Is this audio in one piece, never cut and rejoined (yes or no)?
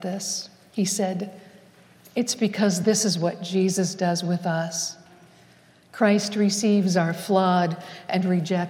yes